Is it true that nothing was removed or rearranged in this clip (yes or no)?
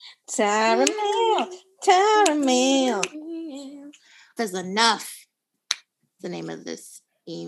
no